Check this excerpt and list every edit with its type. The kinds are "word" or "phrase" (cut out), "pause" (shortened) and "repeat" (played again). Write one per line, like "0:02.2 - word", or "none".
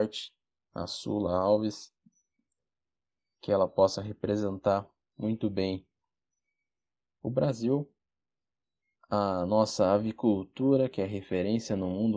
none